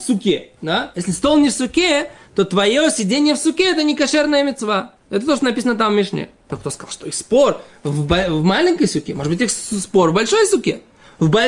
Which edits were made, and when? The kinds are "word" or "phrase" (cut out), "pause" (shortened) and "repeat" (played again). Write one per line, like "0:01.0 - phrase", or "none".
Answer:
none